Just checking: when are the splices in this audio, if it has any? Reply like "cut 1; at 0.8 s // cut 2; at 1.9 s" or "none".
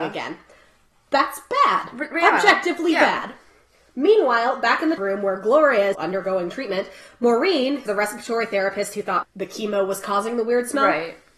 cut 1; at 5.0 s // cut 2; at 5.9 s // cut 3; at 7.9 s // cut 4; at 9.2 s